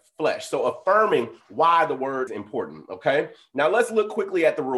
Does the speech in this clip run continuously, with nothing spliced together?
no; 1 cut; at 2.3 s

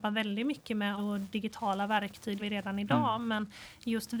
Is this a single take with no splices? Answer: no; 2 cuts; at 1.0 s, 2.4 s

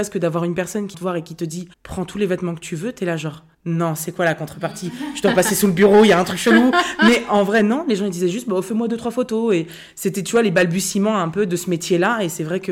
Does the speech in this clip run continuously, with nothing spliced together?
no; 3 cuts; at 0.9 s, 1.7 s, 3.5 s

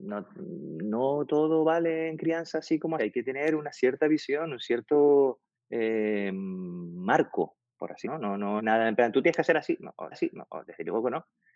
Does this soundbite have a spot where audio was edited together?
yes; 5 cuts; at 3.0 s, 5.5 s, 8.0 s, 8.6 s, 10.1 s

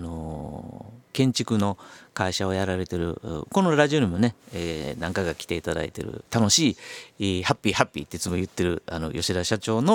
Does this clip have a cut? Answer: no; 0 cuts

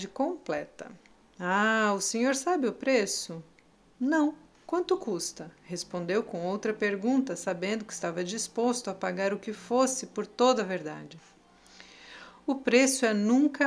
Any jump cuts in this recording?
no; 0 cuts

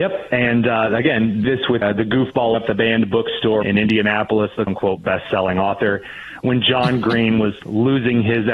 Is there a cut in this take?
yes; 5 cuts; at 1.4 s, 1.8 s, 2.5 s, 3.6 s, 4.7 s

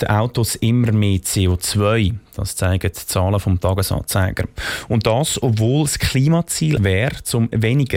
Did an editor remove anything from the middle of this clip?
yes; 1 cut; at 6.8 s

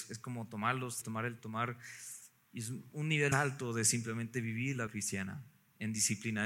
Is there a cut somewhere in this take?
yes; 4 cuts; at 1.0 s, 1.4 s, 3.3 s, 4.9 s

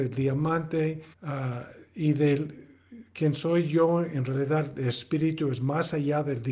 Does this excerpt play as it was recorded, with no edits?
no; 1 cut; at 1.1 s

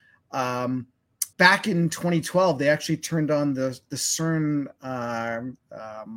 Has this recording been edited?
yes; 1 cut; at 1.3 s

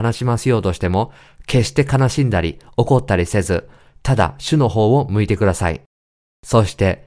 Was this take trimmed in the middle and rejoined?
no; 0 cuts

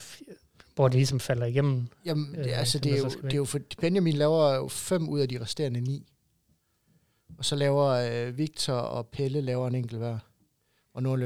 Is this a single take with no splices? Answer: yes; 0 cuts

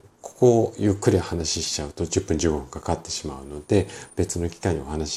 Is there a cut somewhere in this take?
yes; 1 cut; at 4.1 s

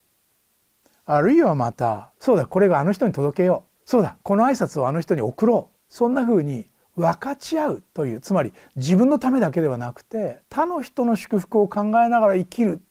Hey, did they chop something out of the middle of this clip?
yes; 5 cuts; at 2.2 s, 3.7 s, 4.2 s, 5.8 s, 10.4 s

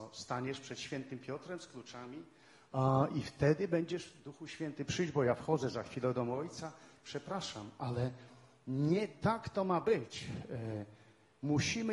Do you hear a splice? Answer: no; 0 cuts

